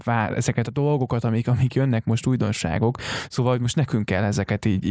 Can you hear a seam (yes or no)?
no